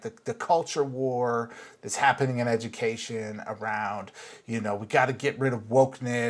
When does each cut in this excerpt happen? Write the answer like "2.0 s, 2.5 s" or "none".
none